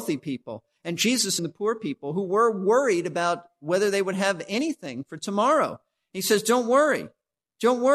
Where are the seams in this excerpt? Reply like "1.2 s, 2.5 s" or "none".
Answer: 1.4 s